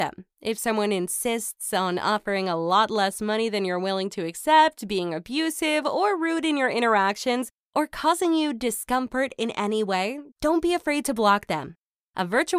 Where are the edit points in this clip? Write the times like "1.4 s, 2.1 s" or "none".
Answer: 10.3 s